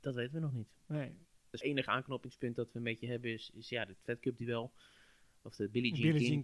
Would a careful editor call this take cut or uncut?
uncut